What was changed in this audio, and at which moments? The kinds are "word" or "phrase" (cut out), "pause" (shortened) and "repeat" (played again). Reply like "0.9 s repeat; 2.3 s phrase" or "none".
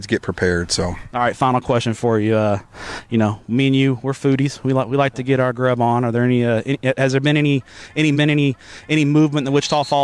8.1 s repeat